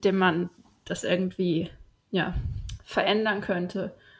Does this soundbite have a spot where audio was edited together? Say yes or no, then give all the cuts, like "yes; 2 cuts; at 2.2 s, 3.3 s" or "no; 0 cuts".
no; 0 cuts